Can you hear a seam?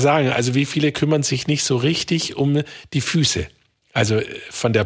no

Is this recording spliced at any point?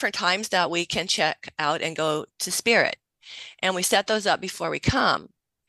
yes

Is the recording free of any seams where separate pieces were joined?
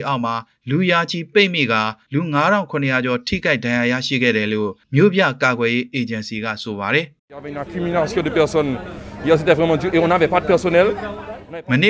no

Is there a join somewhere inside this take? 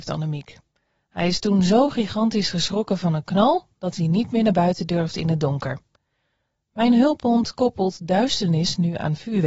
no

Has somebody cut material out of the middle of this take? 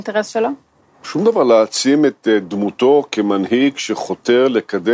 no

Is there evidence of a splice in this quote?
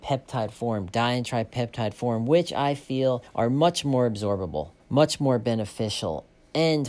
yes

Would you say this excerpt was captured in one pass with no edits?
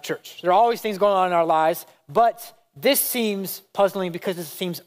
yes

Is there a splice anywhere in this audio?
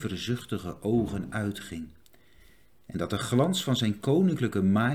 no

